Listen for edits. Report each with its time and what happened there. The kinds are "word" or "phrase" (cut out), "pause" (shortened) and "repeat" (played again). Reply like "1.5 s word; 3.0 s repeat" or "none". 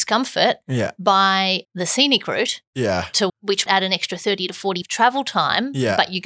1.6 s word; 3.3 s word; 3.7 s word; 4.8 s word